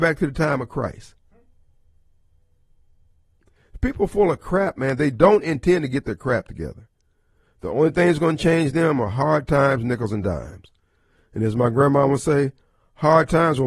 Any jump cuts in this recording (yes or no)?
no